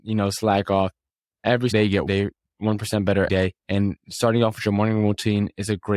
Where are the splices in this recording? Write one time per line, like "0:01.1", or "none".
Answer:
0:01.7
0:02.1
0:03.3
0:03.6